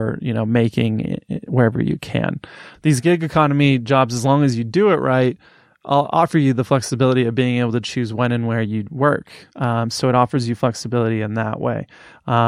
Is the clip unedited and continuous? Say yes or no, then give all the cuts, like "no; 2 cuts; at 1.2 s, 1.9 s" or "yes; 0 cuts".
yes; 0 cuts